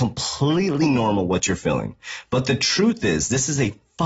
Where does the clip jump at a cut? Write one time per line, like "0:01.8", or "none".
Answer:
none